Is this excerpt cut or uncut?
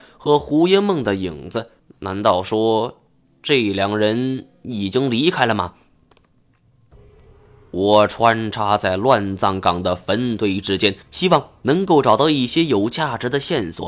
cut